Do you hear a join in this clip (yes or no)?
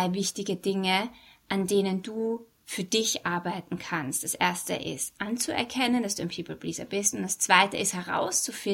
no